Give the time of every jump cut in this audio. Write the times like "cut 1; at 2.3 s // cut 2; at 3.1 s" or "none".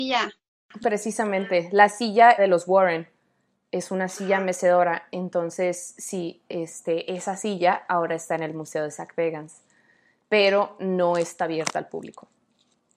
cut 1; at 2.4 s